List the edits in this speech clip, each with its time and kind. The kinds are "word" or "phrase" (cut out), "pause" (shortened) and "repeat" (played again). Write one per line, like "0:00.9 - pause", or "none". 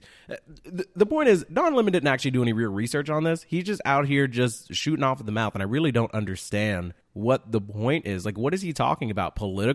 none